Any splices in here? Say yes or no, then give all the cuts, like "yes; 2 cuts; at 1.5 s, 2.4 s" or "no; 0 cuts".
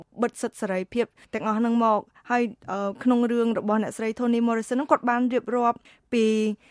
no; 0 cuts